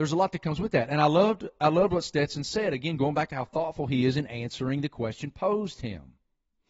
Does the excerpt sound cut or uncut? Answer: uncut